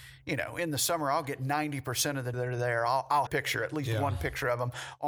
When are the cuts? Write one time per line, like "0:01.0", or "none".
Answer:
0:02.3
0:03.3